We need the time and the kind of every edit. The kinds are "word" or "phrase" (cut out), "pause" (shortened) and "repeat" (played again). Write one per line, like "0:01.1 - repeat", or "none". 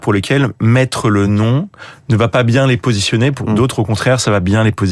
none

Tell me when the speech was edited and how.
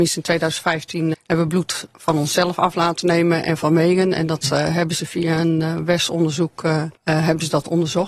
0:01.1 - word
0:06.9 - pause

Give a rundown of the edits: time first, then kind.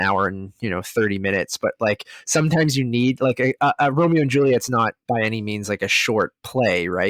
0:05.0 - pause

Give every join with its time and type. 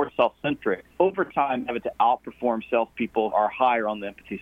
0:00.9 - pause
0:01.8 - word
0:03.3 - word

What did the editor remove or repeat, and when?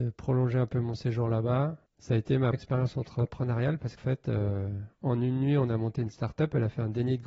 0:01.9 - pause
0:02.5 - word
0:04.0 - word

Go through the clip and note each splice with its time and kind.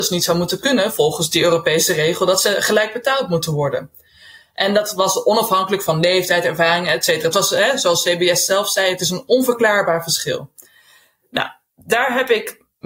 none

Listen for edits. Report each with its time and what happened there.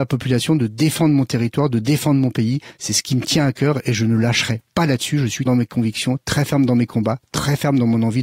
0:05.5 - phrase

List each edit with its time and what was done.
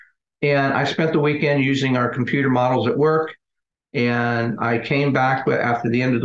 none

